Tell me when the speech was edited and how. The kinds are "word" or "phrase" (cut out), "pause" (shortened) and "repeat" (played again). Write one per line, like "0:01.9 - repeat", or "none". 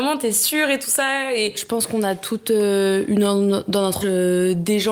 0:04.0 - word